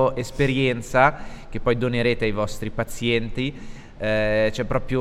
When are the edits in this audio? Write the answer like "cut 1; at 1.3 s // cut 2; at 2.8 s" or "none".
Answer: none